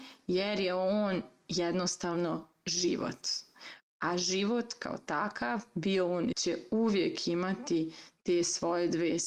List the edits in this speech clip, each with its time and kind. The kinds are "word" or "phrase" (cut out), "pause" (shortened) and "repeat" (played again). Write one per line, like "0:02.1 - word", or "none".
0:06.3 - phrase